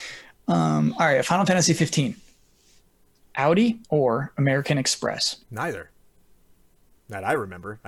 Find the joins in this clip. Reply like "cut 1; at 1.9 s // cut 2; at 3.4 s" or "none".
cut 1; at 3.8 s // cut 2; at 5.4 s